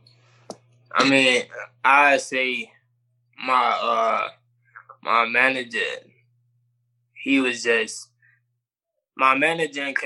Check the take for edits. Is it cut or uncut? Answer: uncut